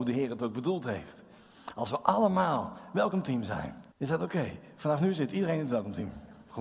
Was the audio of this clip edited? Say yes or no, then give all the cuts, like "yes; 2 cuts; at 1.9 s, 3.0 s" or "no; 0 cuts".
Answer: yes; 1 cut; at 3.9 s